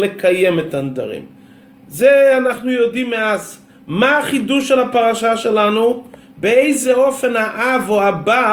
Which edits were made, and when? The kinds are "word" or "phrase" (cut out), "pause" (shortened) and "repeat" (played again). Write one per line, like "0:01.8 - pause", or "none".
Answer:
none